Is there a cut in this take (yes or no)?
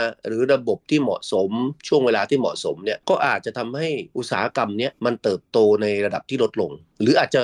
no